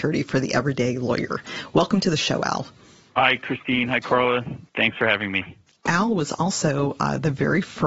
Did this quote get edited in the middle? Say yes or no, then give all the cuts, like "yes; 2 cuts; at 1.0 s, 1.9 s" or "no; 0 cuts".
no; 0 cuts